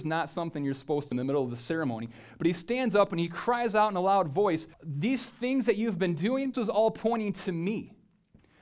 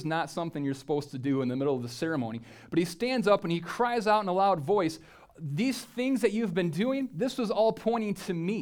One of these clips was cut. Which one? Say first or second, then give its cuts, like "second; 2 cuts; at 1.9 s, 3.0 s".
first; 3 cuts; at 1.1 s, 4.7 s, 6.5 s